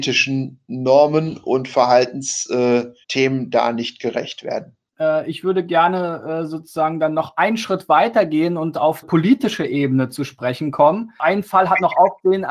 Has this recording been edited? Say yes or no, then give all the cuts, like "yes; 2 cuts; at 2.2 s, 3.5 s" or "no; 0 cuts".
yes; 2 cuts; at 3.0 s, 9.0 s